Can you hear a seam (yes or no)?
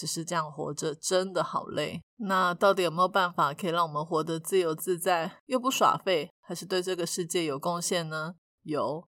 yes